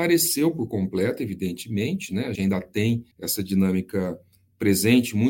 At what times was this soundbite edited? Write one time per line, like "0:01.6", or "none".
0:02.3
0:03.1